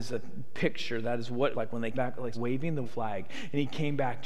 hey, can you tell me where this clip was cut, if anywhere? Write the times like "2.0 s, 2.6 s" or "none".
1.5 s, 1.9 s, 2.3 s, 2.8 s